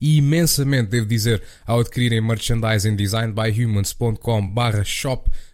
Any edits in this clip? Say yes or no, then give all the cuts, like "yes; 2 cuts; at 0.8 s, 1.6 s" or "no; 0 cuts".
no; 0 cuts